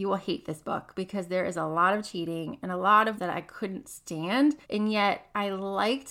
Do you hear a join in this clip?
yes; 2 cuts; at 3.2 s, 4.6 s

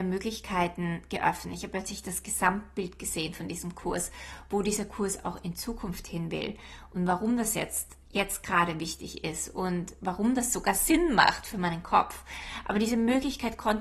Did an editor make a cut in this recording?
no; 0 cuts

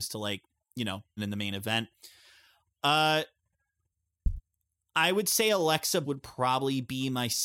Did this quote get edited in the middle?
yes; 2 cuts; at 1.2 s, 6.0 s

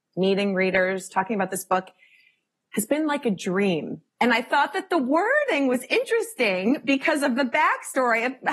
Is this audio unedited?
yes; 0 cuts

